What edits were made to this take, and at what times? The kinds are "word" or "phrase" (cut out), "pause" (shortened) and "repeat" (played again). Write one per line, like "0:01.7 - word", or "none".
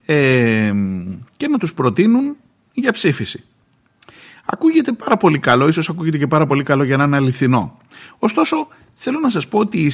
none